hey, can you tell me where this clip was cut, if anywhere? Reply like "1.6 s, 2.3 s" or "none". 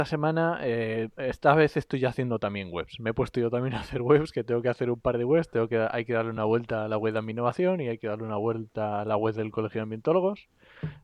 none